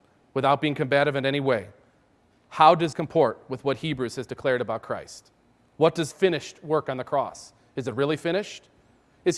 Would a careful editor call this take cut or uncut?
cut